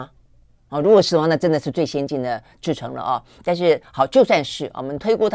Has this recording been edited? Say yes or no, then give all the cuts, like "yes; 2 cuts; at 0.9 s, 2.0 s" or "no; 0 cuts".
no; 0 cuts